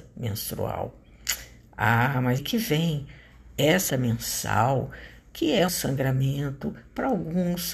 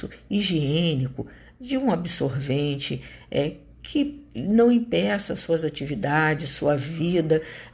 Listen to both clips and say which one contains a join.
first; 3 cuts; at 2.4 s, 3.9 s, 5.7 s

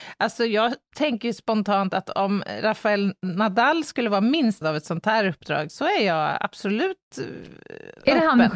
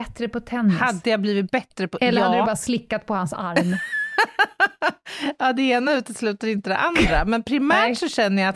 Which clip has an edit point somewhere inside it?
first; 2 cuts; at 4.6 s, 5.7 s

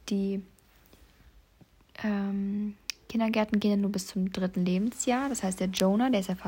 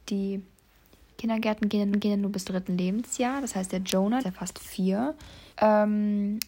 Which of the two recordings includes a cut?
second; 5 cuts; at 1.1 s, 1.9 s, 2.4 s, 4.2 s, 5.5 s

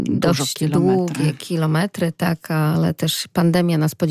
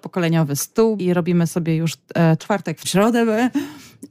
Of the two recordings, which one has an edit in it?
second; 3 cuts; at 1.0 s, 2.4 s, 2.8 s

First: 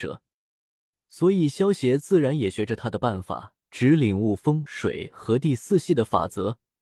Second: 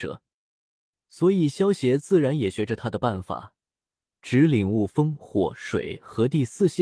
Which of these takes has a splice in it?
first; 2 cuts; at 3.6 s, 4.7 s

